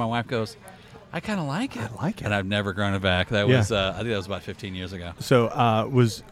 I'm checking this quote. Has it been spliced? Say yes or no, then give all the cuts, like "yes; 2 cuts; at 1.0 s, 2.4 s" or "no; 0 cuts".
no; 0 cuts